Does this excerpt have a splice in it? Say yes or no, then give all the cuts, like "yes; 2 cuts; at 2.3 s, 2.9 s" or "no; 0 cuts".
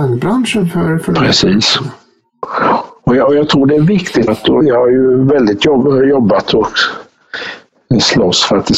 yes; 2 cuts; at 4.3 s, 4.6 s